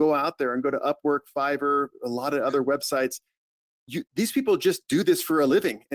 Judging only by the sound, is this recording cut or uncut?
uncut